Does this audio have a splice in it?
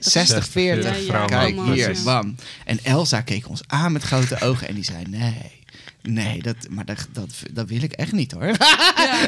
no; 0 cuts

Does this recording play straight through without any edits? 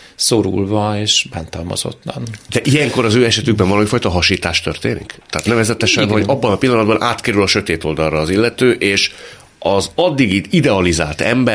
yes; 0 cuts

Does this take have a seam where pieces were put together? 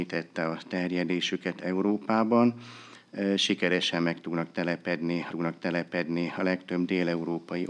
yes; 1 cut; at 5.3 s

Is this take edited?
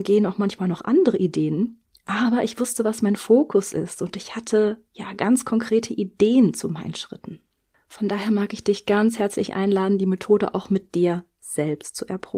no; 0 cuts

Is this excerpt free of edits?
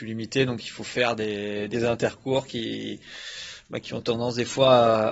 no; 1 cut; at 1.7 s

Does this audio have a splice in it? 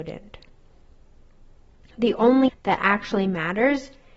yes; 1 cut; at 2.5 s

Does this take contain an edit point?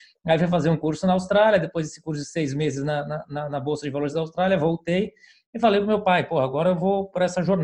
no; 0 cuts

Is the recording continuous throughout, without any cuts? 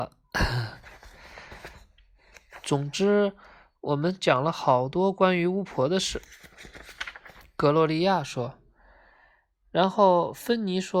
yes; 0 cuts

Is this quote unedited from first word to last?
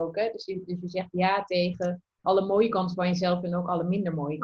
no; 1 cut; at 2.2 s

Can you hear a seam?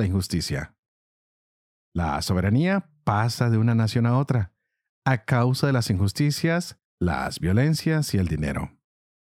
no; 0 cuts

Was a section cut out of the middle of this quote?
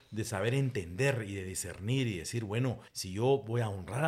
yes; 1 cut; at 2.9 s

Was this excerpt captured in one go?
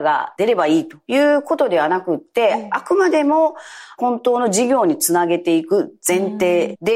yes; 0 cuts

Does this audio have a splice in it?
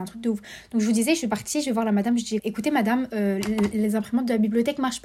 yes; 1 cut; at 2.4 s

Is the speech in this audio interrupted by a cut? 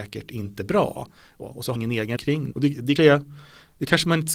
yes; 5 cuts; at 1.4 s, 1.8 s, 2.2 s, 2.5 s, 3.0 s

